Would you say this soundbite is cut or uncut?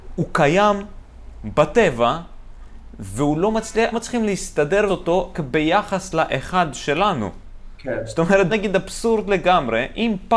cut